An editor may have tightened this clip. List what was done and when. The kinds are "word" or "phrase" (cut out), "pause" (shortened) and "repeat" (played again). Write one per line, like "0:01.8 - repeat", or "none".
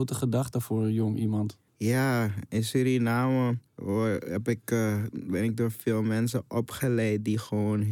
0:01.7 - pause
0:03.7 - pause